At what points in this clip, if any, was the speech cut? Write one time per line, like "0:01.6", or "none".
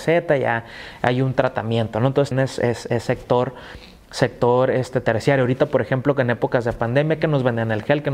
0:02.3

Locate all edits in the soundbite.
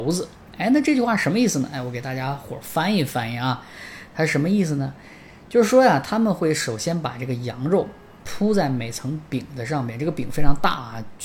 none

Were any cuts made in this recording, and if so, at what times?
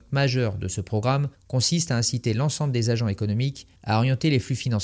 0:01.3
0:03.8

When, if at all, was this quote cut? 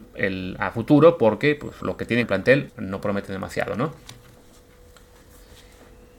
0:01.8
0:02.2
0:02.7

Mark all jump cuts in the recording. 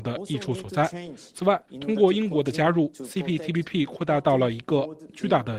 0:01.7

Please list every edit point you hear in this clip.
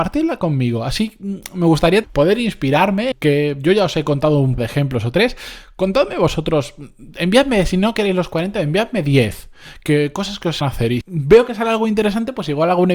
0:02.0
0:03.1
0:04.6
0:10.6
0:11.0

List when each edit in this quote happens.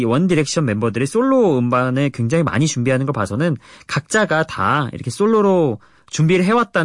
none

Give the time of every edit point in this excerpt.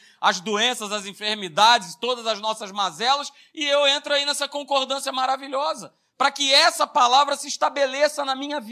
none

